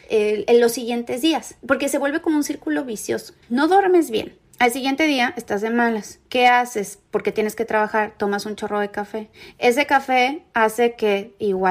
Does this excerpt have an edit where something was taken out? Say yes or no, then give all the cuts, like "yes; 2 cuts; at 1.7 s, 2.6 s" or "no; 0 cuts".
yes; 2 cuts; at 3.4 s, 6.3 s